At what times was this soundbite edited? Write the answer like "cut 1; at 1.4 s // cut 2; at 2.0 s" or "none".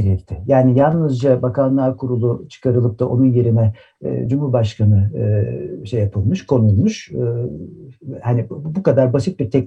none